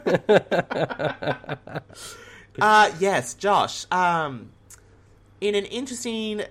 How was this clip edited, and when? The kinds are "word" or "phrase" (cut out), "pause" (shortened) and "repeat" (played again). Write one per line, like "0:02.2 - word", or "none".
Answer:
none